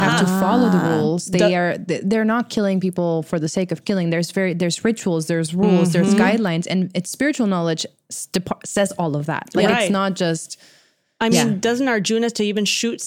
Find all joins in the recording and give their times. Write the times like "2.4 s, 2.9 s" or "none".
none